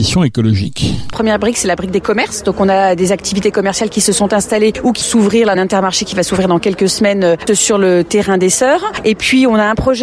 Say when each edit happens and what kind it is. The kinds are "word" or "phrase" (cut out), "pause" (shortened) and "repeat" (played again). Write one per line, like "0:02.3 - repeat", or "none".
0:05.0 - word
0:05.5 - phrase
0:07.5 - word